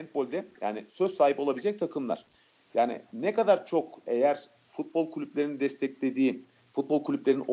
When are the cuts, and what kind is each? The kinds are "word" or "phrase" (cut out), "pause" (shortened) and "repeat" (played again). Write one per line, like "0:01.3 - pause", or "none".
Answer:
none

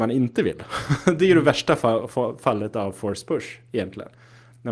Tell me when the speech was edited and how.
none

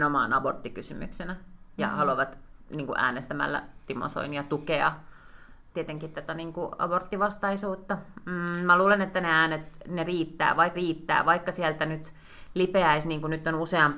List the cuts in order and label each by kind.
0:10.7 - repeat

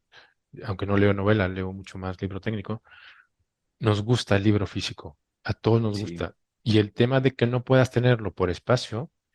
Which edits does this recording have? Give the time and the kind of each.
none

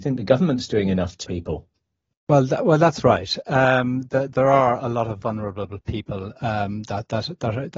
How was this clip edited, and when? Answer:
0:01.2 - phrase

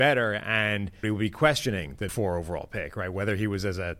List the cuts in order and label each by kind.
0:01.0 - word
0:02.1 - word

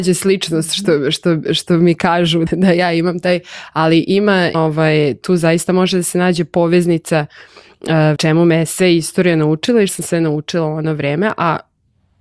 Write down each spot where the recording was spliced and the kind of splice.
0:02.5 - word
0:04.5 - word
0:08.2 - phrase
0:09.9 - word

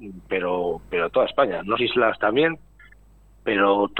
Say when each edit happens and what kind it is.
0:01.8 - phrase

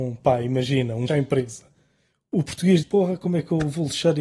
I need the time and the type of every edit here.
0:01.1 - word
0:02.8 - word

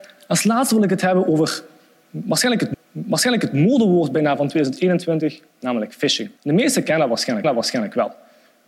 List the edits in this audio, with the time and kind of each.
0:02.7 - repeat
0:05.5 - pause
0:06.4 - pause
0:07.4 - repeat

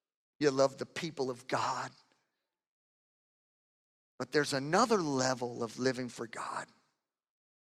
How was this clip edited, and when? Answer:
none

